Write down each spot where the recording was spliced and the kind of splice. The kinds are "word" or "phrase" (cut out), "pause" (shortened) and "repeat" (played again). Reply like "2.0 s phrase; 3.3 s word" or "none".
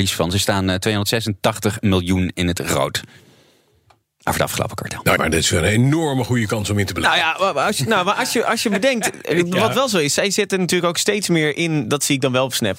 5.2 s word